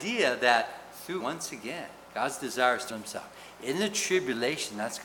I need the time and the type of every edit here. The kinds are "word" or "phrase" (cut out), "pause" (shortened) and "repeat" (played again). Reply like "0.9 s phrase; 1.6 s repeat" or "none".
1.2 s word; 2.0 s pause; 2.9 s word